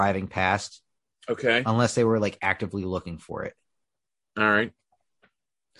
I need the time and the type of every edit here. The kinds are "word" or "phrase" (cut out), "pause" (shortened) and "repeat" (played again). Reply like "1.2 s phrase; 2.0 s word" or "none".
none